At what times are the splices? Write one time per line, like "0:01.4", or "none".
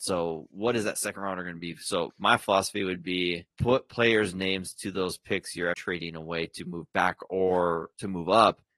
0:02.1
0:03.5
0:05.7